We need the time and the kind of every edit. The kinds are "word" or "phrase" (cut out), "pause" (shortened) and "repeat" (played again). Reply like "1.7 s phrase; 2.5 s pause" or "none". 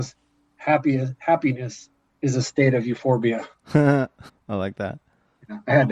4.3 s pause